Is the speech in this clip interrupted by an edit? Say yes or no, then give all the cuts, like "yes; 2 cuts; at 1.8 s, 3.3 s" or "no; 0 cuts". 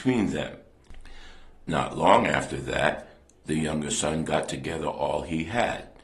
no; 0 cuts